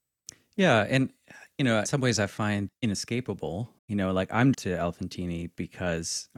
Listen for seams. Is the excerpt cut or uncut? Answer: cut